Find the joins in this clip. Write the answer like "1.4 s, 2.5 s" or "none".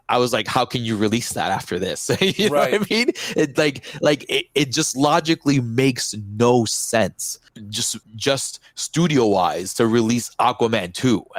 8.0 s